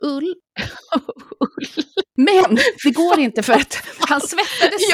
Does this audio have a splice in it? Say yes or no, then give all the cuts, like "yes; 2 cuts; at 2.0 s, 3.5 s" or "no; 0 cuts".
no; 0 cuts